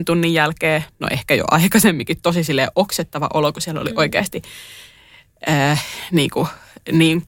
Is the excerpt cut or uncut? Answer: uncut